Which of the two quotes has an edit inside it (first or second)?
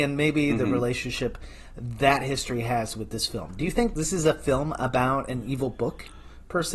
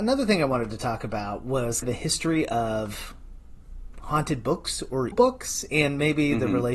second